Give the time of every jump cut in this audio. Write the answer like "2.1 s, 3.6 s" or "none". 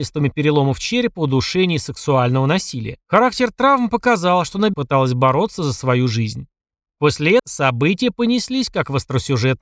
3.0 s, 4.7 s, 7.4 s